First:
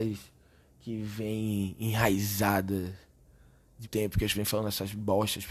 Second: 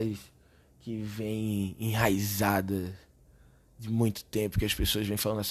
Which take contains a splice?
first; 2 cuts; at 3.8 s, 4.3 s

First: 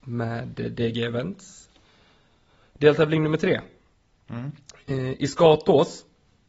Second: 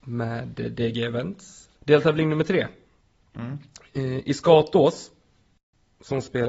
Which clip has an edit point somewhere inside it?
second; 1 cut; at 1.8 s

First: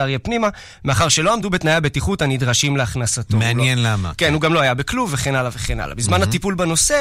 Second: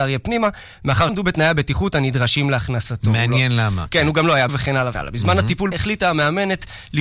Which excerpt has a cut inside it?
second; 4 cuts; at 1.1 s, 4.5 s, 4.9 s, 5.7 s

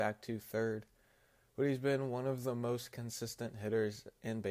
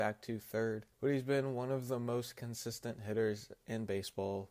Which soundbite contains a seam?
second; 1 cut; at 0.9 s

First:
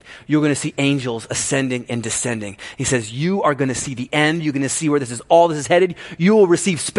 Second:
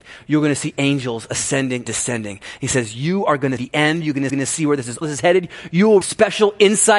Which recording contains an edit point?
second; 5 cuts; at 1.9 s, 3.6 s, 4.3 s, 5.0 s, 6.0 s

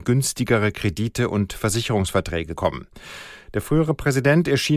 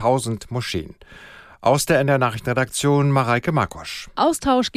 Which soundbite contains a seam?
first; 1 cut; at 2.6 s

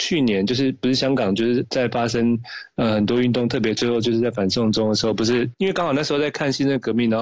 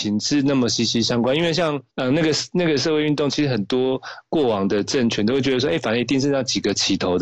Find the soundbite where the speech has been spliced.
second; 1 cut; at 1.9 s

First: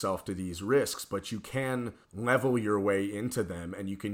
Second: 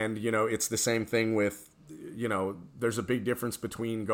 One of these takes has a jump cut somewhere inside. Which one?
first; 1 cut; at 2.0 s

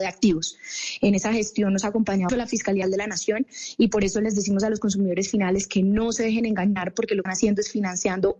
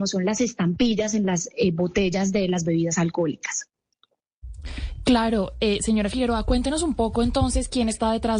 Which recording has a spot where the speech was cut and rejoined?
first; 3 cuts; at 2.3 s, 2.8 s, 7.3 s

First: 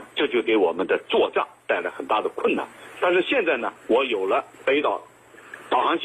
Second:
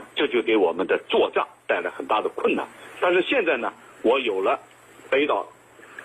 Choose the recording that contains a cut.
first; 2 cuts; at 3.8 s, 4.5 s

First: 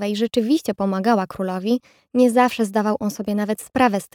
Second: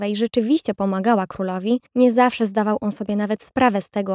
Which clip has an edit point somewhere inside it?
second; 1 cut; at 1.9 s

